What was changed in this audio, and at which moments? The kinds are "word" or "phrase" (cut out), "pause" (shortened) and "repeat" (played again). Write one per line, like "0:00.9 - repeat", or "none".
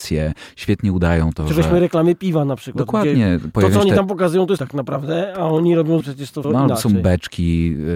0:04.6 - word
0:06.0 - word
0:06.4 - word